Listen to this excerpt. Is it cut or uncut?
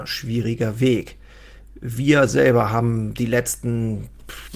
uncut